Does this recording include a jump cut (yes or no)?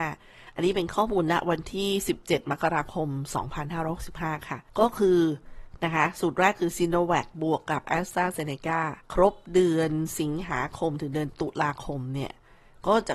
yes